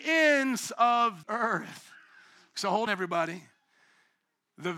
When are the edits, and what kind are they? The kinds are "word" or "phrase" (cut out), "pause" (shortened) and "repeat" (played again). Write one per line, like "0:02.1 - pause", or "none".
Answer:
0:01.2 - word
0:02.9 - word